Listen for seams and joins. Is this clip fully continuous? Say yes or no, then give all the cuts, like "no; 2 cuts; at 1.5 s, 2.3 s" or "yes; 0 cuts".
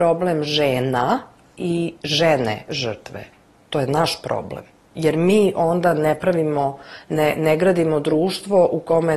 yes; 0 cuts